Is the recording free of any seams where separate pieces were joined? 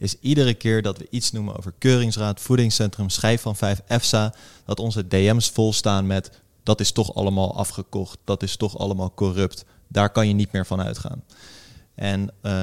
yes; 0 cuts

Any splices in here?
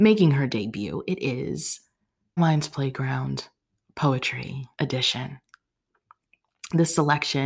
yes; 2 cuts; at 2.4 s, 4.7 s

